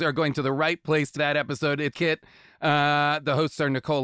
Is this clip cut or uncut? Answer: cut